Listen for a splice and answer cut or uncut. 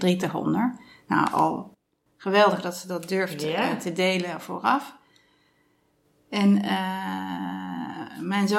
uncut